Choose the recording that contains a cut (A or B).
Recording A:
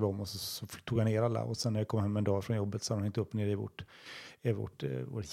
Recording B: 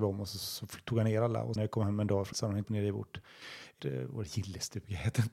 B